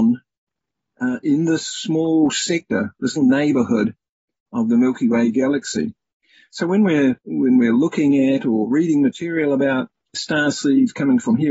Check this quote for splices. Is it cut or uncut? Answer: cut